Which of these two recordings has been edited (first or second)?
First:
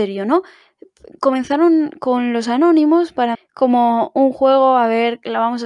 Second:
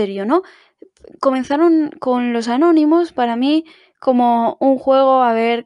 first